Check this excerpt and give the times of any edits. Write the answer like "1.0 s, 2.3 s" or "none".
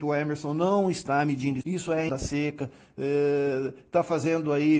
1.6 s, 2.1 s